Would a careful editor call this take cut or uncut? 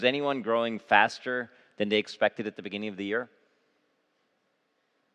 uncut